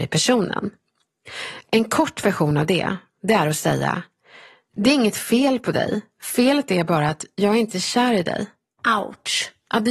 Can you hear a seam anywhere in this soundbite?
no; 0 cuts

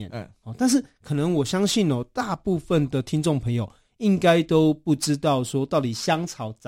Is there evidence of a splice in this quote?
no; 0 cuts

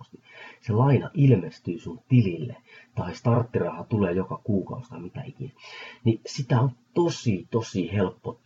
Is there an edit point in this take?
no; 0 cuts

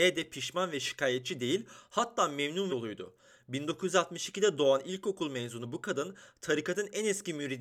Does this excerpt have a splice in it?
yes; 1 cut; at 2.7 s

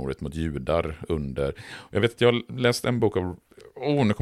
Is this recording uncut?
yes; 0 cuts

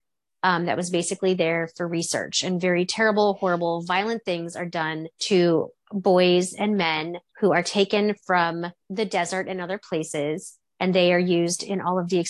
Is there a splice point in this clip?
yes; 3 cuts; at 5.1 s, 7.3 s, 8.8 s

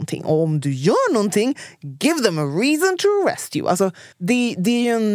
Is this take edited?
yes; 1 cut; at 4.1 s

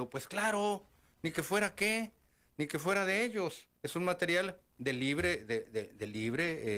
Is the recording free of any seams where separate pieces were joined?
no; 1 cut; at 3.8 s

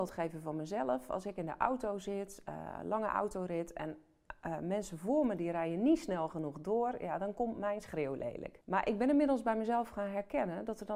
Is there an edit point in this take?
no; 0 cuts

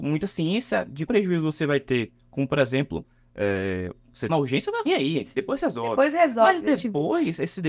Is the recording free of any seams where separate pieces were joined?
no; 3 cuts; at 1.1 s, 4.3 s, 4.9 s

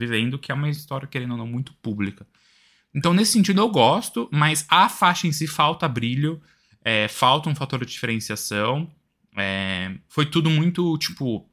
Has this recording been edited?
no; 0 cuts

